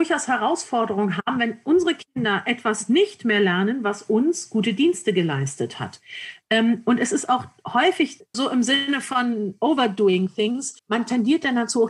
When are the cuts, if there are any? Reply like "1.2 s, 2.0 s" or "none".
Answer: 8.3 s, 10.8 s